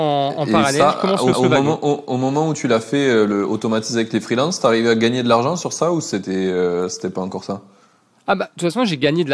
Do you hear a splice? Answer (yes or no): yes